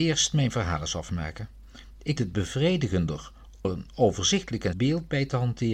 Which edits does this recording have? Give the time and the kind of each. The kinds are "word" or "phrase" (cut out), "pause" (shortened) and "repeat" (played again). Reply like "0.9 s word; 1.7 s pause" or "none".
2.2 s word; 3.6 s word; 4.7 s word